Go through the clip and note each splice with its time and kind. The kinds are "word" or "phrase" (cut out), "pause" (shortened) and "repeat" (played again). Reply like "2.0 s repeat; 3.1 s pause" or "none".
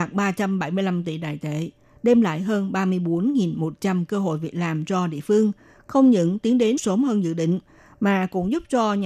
6.8 s phrase